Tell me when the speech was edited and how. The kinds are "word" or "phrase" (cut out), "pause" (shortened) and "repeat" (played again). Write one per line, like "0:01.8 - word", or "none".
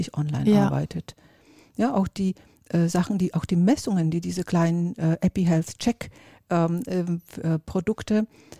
none